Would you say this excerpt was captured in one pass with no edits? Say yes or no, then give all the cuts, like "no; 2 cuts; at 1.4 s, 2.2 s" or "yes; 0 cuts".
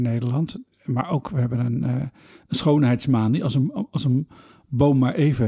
yes; 0 cuts